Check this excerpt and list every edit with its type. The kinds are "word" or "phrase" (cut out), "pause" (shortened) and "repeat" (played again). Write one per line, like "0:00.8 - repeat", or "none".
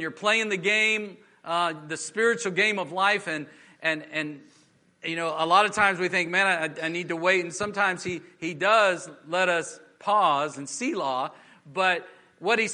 none